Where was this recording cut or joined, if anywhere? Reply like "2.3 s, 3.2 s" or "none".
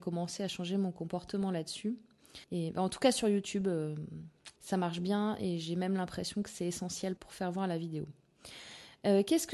2.4 s, 4.6 s, 7.2 s